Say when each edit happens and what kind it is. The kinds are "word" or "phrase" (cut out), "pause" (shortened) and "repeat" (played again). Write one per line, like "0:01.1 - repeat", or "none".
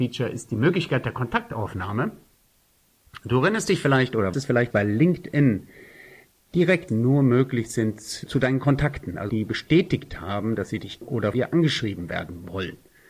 0:04.3 - word
0:04.7 - word
0:06.9 - word
0:08.3 - word
0:09.3 - word
0:11.0 - word
0:11.3 - word